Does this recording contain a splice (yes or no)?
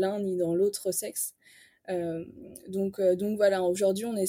no